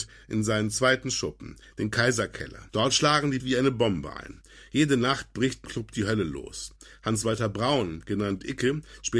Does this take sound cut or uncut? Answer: cut